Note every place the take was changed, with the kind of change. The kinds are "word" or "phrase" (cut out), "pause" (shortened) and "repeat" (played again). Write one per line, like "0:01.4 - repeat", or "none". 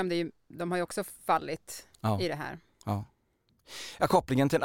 none